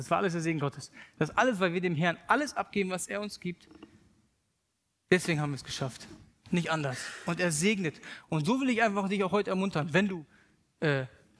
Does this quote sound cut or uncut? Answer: uncut